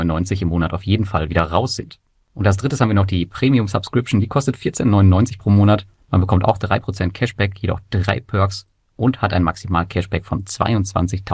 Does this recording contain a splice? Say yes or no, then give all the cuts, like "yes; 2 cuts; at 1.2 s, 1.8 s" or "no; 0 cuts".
no; 0 cuts